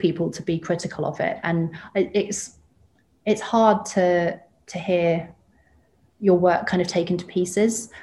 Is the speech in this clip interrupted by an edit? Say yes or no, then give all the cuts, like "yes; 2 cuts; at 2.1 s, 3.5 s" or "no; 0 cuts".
no; 0 cuts